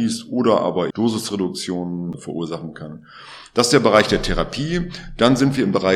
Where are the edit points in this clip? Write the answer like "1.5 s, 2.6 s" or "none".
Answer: 0.9 s